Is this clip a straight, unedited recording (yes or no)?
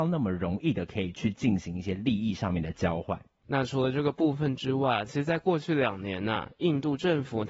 yes